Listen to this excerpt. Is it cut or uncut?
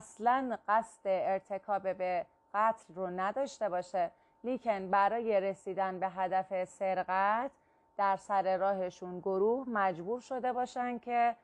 uncut